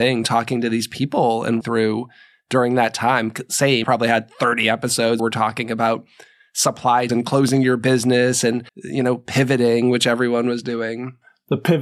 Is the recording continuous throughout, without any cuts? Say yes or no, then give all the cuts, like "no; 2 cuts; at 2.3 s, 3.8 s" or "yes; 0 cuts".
no; 5 cuts; at 1.6 s, 3.8 s, 5.2 s, 7.1 s, 8.7 s